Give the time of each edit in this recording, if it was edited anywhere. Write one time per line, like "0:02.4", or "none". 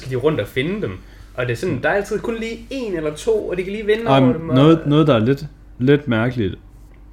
0:05.7